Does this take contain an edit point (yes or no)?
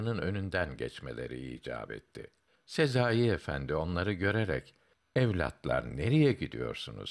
no